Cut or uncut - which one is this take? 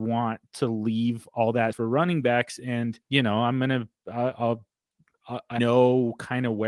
cut